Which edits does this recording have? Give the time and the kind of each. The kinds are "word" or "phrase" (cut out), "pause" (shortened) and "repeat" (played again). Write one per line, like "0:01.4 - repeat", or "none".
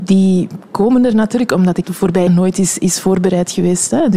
0:01.8 - word
0:02.3 - word